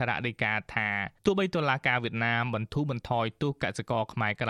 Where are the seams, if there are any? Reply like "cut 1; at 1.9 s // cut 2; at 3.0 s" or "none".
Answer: cut 1; at 1.2 s